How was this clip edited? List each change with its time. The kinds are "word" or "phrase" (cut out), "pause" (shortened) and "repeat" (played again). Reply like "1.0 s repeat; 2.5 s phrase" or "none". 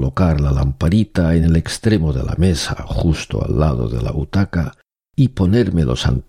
none